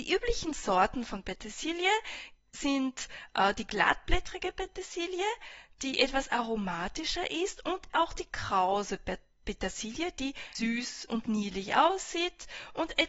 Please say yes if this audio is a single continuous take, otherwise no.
no